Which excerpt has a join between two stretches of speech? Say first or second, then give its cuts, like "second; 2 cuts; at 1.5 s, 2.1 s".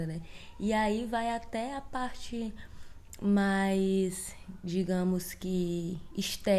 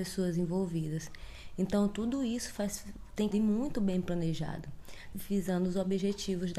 second; 2 cuts; at 3.3 s, 5.1 s